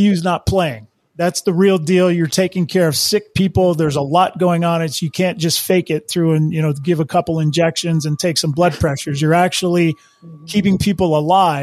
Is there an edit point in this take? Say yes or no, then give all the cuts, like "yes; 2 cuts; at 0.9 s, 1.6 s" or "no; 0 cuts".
no; 0 cuts